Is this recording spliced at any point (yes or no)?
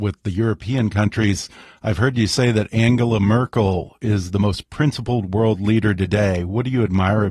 no